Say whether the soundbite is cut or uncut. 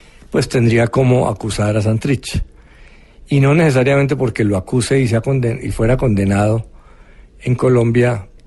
uncut